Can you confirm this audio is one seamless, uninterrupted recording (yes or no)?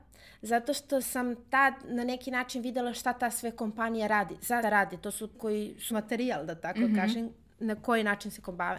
no